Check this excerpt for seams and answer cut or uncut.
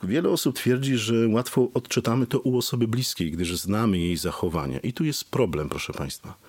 uncut